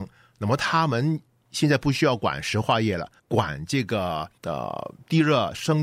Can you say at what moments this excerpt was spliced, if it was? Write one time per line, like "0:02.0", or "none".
0:01.3
0:03.2
0:04.4